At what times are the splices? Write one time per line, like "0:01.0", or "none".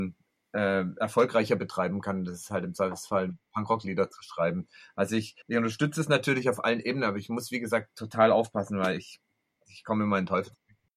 0:05.4